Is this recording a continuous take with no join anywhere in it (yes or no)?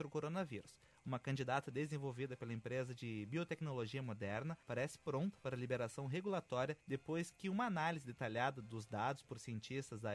no